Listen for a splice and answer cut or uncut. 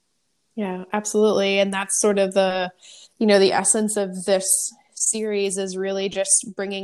cut